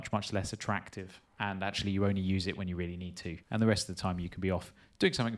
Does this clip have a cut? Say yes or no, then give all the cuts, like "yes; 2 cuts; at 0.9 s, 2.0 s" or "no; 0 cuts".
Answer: yes; 2 cuts; at 1.3 s, 3.4 s